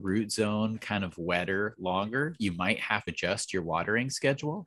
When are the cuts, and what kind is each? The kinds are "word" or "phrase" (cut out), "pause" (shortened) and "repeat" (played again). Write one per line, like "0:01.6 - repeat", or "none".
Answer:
0:03.1 - word